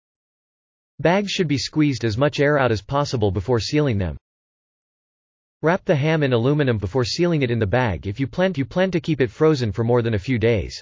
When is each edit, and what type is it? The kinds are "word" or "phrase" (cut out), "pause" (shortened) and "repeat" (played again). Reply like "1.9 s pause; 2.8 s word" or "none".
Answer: 6.8 s word; 8.5 s repeat